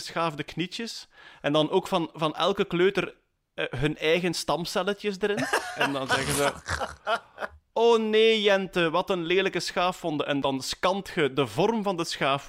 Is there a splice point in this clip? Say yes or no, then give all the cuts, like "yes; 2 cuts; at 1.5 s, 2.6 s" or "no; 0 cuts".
no; 0 cuts